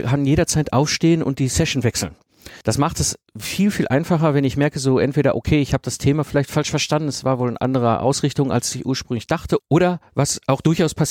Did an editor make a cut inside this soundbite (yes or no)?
yes